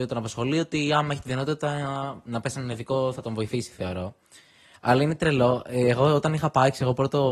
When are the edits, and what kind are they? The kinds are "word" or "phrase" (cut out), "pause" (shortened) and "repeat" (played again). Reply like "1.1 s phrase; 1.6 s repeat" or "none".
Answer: none